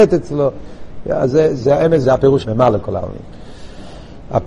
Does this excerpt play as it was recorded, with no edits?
no; 3 cuts; at 1.6 s, 2.0 s, 2.4 s

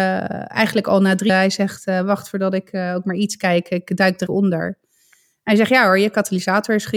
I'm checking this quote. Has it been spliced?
yes; 2 cuts; at 1.3 s, 4.3 s

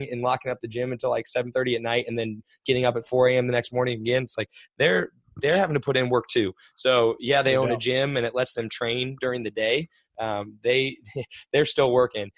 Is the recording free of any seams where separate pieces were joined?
yes; 0 cuts

